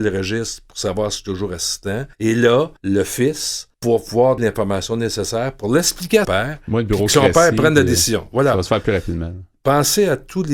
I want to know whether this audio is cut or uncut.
cut